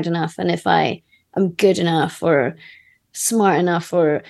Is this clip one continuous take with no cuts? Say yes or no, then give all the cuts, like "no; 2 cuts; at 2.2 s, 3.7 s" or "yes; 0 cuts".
yes; 0 cuts